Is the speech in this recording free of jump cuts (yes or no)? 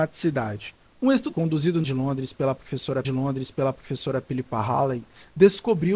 no